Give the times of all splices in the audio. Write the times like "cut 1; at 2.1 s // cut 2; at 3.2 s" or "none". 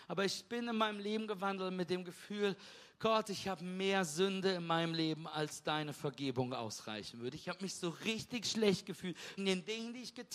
cut 1; at 9.4 s